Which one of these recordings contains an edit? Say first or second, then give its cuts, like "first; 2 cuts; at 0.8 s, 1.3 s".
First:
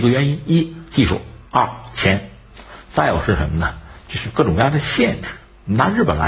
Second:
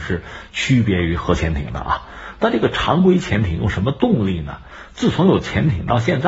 first; 1 cut; at 1.5 s